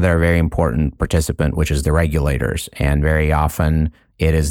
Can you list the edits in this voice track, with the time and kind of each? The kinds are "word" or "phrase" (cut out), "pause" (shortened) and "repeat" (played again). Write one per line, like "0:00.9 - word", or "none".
0:01.0 - word